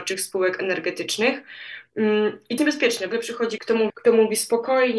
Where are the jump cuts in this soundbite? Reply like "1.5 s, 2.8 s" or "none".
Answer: 2.6 s, 3.1 s, 3.6 s, 3.9 s